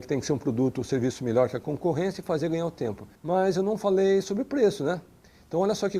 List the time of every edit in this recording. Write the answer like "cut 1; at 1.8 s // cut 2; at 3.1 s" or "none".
cut 1; at 3.1 s